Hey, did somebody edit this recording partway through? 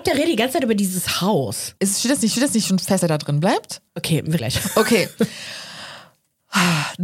yes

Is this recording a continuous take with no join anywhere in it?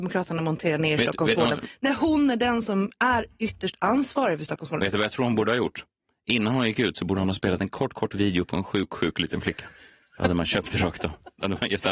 yes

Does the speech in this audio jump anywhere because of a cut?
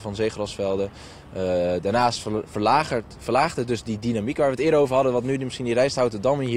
no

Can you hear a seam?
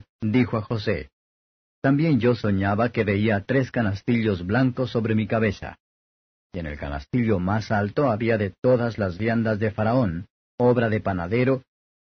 no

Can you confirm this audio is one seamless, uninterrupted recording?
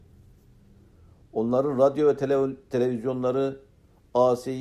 yes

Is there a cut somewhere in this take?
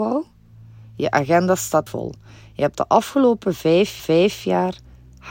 yes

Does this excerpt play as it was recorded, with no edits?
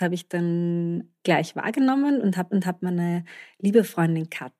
no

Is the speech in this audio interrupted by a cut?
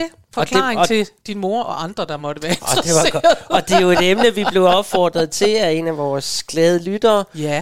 no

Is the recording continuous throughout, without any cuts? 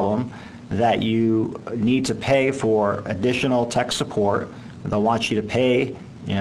yes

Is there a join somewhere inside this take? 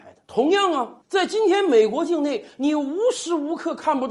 yes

